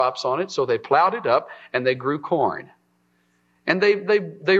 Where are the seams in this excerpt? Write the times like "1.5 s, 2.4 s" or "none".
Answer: none

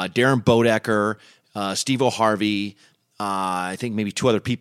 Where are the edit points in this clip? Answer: none

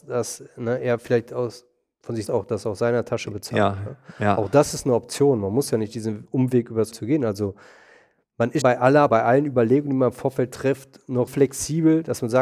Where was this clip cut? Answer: 2.3 s, 6.9 s, 8.6 s, 9.1 s, 11.3 s

